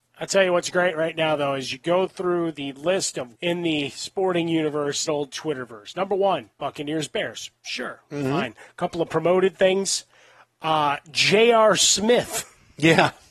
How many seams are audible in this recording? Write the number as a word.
three